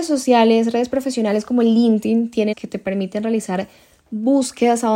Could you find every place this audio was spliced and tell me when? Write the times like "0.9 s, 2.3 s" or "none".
2.5 s